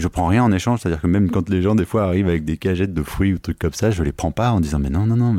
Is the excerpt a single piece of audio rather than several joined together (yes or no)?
yes